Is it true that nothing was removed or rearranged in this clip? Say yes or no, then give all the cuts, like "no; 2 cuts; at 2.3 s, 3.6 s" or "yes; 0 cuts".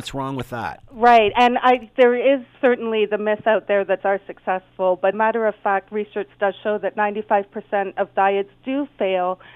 no; 3 cuts; at 2.5 s, 4.0 s, 5.1 s